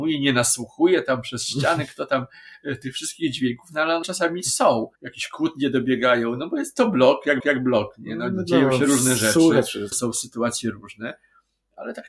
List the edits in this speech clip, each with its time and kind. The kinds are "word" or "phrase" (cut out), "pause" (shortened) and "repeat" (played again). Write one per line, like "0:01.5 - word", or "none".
0:04.0 - word
0:04.9 - pause
0:07.4 - repeat
0:09.9 - word